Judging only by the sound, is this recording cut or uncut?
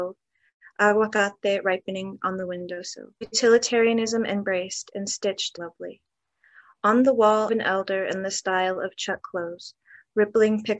cut